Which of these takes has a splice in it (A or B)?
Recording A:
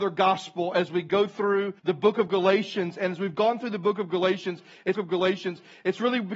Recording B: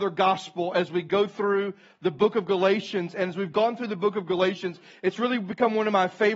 A